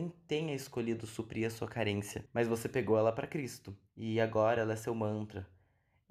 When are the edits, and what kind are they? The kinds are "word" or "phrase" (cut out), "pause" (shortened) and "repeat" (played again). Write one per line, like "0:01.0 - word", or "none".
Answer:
0:03.9 - pause